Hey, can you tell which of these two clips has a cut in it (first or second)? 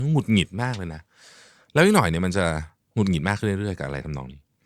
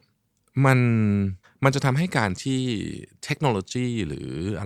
second